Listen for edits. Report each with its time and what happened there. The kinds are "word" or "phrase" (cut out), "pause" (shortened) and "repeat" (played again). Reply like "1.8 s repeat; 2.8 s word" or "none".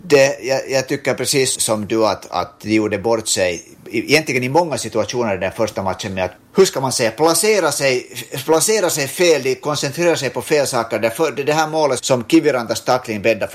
1.6 s word; 12.0 s word